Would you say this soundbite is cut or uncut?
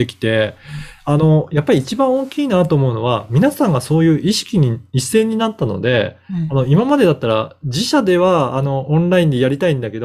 uncut